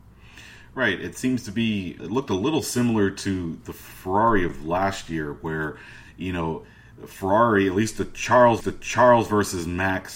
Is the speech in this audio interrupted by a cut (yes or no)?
yes